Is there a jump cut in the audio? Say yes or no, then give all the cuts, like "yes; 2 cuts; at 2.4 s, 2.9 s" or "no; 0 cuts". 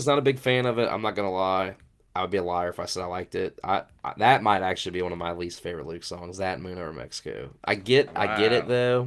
no; 0 cuts